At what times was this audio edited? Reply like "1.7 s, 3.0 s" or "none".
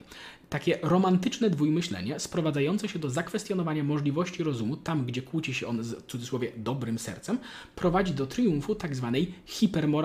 none